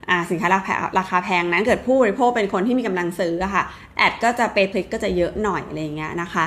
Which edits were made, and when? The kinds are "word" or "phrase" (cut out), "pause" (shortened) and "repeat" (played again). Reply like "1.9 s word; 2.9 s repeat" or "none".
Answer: 4.7 s word